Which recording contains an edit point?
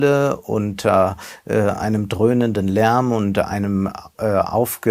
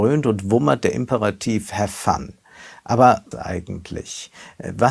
second; 1 cut; at 3.3 s

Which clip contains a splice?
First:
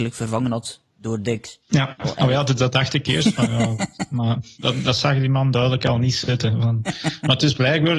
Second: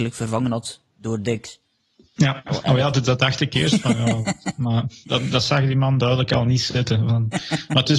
first; 1 cut; at 1.6 s

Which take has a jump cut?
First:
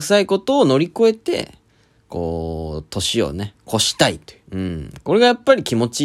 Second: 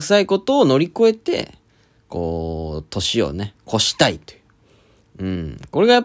first; 1 cut; at 4.4 s

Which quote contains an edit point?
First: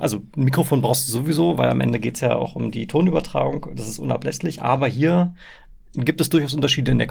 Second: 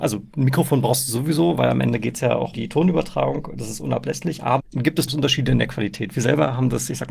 second; 3 cuts; at 2.5 s, 4.6 s, 5.1 s

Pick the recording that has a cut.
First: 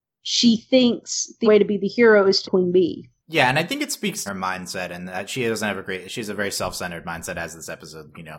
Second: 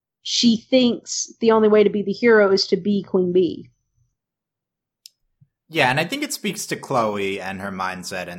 first; 4 cuts; at 1.4 s, 2.4 s, 3.2 s, 4.3 s

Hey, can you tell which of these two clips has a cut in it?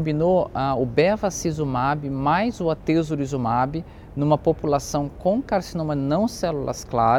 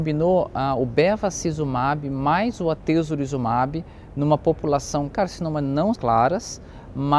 second; 2 cuts; at 5.1 s, 6.0 s

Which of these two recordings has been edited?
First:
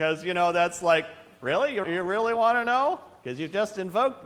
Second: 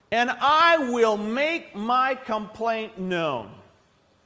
first; 1 cut; at 1.8 s

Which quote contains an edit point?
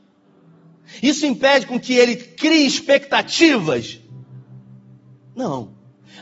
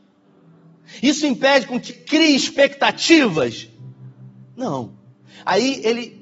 second; 2 cuts; at 1.9 s, 4.4 s

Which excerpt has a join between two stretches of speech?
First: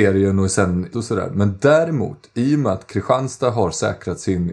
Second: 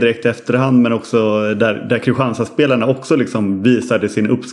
first; 1 cut; at 0.9 s

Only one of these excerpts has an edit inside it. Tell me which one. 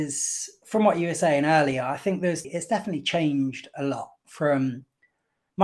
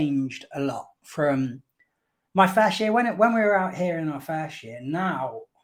first; 1 cut; at 2.4 s

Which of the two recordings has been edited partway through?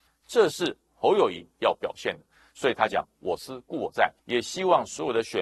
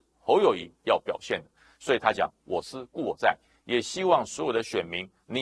first; 1 cut; at 4.2 s

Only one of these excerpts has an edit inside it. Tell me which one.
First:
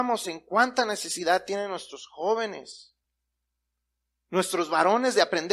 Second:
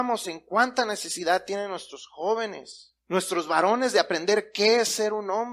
second; 1 cut; at 3.0 s

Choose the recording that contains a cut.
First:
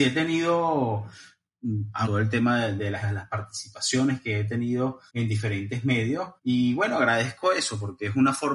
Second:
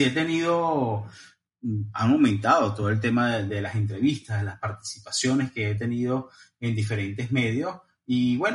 first; 4 cuts; at 2.0 s, 3.0 s, 5.1 s, 6.4 s

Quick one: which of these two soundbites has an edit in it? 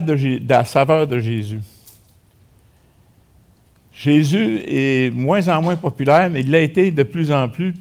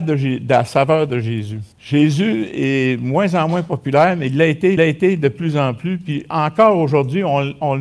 second; 2 cuts; at 1.7 s, 4.8 s

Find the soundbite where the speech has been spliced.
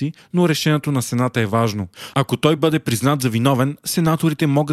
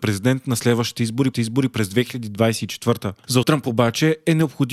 second; 2 cuts; at 1.3 s, 3.4 s

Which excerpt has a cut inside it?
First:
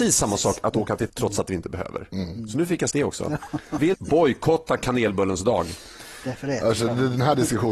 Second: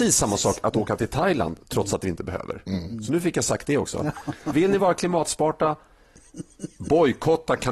first; 3 cuts; at 1.1 s, 2.9 s, 3.9 s

